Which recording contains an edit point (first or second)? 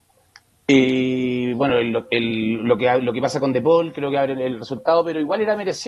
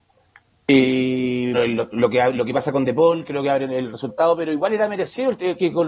second